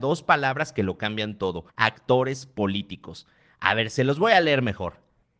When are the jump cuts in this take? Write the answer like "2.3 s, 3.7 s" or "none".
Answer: 1.7 s